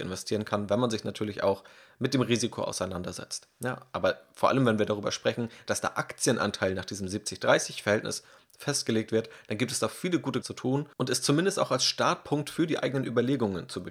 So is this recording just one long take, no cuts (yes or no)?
no